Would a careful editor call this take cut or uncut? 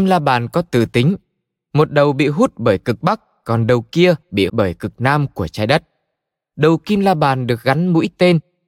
cut